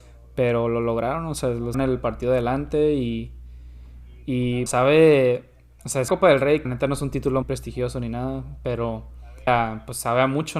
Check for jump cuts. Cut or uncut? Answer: cut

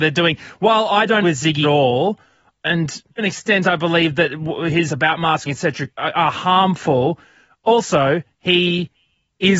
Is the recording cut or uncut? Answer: cut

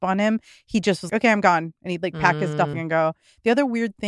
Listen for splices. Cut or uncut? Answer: cut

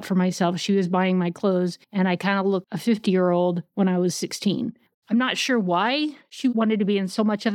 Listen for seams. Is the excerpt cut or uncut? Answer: cut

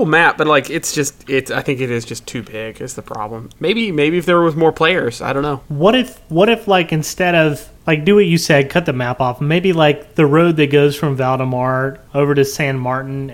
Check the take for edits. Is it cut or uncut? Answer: cut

